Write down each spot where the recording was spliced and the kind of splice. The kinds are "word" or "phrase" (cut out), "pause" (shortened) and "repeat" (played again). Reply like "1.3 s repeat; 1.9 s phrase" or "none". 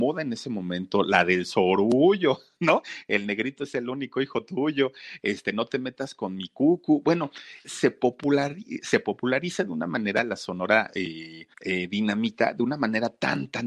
7.6 s word; 11.5 s pause